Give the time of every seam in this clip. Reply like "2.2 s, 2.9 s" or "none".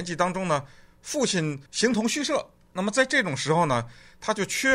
1.7 s